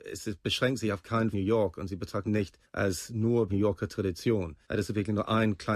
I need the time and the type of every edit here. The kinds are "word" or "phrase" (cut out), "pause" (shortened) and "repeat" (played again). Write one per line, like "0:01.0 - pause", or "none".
0:01.3 - phrase
0:02.2 - word
0:02.6 - pause
0:03.5 - phrase
0:04.6 - pause